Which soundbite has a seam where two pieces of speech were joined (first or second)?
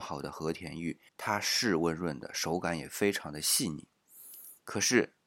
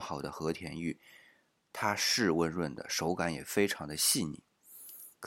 first